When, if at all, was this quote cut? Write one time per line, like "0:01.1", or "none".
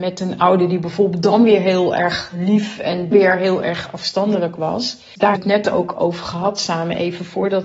0:03.1
0:05.4